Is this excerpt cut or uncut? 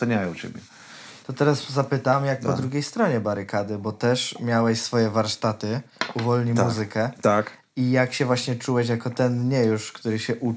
uncut